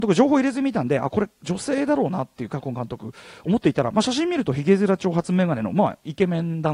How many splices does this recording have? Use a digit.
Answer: 0